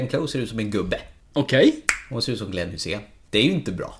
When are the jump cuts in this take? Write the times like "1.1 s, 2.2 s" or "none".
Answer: none

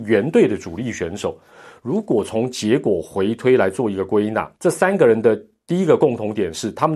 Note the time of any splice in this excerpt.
4.6 s

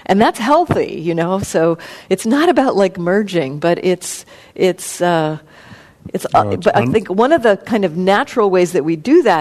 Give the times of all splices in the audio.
none

